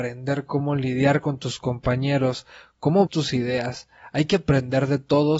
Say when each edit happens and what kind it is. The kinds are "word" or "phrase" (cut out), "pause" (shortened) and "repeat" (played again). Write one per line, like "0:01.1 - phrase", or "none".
0:03.1 - word